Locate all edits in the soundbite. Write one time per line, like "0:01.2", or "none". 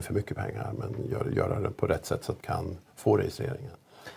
0:01.7
0:02.4